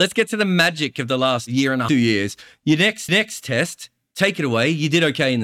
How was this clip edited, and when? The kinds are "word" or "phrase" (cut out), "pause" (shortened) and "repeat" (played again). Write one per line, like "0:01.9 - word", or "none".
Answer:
0:01.9 - phrase
0:03.1 - repeat